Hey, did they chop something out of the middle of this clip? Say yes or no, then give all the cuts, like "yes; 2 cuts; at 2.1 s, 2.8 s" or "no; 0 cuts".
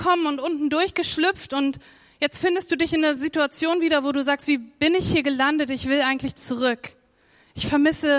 no; 0 cuts